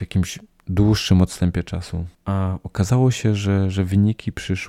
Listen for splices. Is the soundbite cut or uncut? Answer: cut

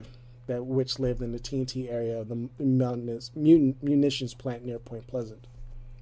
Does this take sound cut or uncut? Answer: uncut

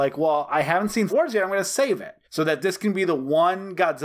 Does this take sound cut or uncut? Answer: cut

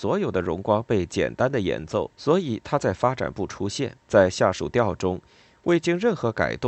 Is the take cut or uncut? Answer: cut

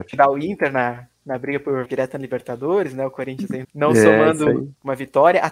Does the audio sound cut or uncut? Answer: cut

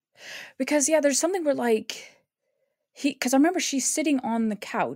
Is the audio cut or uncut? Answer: uncut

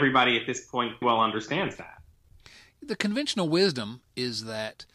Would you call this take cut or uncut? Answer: cut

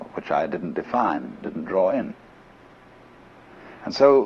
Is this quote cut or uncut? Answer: cut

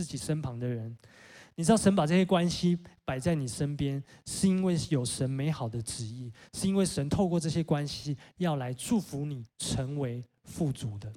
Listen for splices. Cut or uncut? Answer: cut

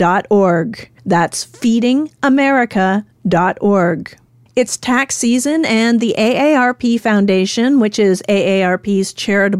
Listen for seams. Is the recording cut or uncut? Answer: cut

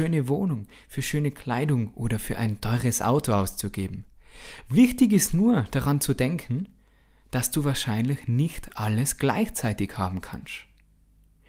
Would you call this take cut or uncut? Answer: uncut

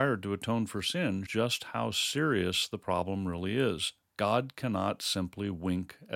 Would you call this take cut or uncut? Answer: cut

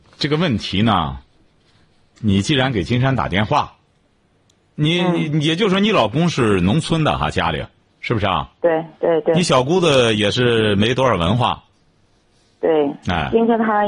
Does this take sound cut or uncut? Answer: cut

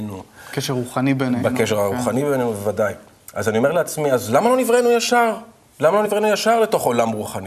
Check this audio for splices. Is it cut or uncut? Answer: uncut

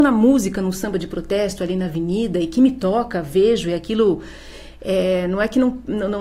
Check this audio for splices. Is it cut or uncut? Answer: uncut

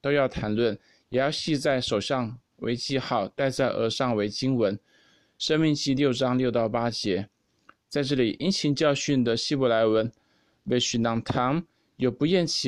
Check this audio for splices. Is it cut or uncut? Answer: uncut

